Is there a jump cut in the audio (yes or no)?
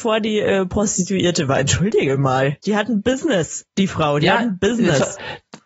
yes